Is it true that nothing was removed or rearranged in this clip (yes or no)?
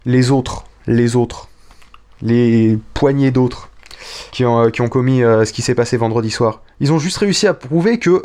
no